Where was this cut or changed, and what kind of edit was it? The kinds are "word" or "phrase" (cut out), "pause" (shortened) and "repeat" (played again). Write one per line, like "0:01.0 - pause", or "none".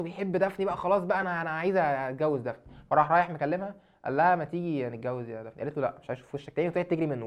none